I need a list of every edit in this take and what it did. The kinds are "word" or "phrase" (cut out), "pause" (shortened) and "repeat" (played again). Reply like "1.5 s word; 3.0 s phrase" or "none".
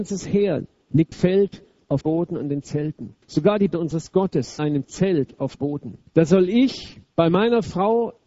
1.1 s word; 2.0 s word; 3.2 s pause; 3.7 s word; 4.6 s phrase; 5.6 s word; 6.1 s pause; 7.1 s pause